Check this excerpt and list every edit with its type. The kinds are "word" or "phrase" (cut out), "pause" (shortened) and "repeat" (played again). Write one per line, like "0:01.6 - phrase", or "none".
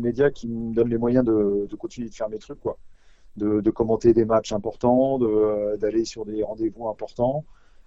none